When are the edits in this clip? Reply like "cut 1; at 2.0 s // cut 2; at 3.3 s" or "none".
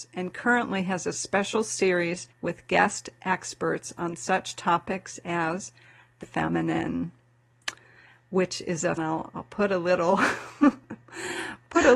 cut 1; at 2.3 s // cut 2; at 6.2 s // cut 3; at 9.0 s